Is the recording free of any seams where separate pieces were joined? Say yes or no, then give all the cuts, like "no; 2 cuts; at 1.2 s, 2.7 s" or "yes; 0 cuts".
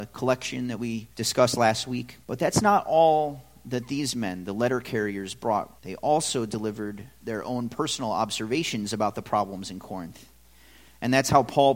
no; 3 cuts; at 1.1 s, 2.2 s, 5.8 s